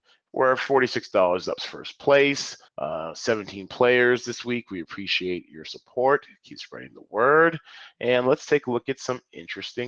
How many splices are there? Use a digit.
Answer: 2